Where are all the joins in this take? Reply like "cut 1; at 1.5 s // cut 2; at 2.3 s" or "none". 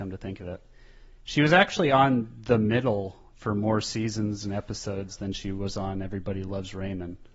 none